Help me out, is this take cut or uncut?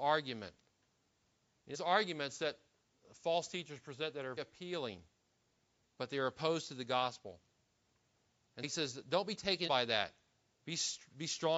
cut